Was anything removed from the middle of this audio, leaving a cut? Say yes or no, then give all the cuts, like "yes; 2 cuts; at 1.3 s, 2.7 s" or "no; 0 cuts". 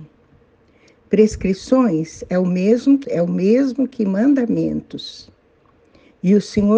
yes; 1 cut; at 3.0 s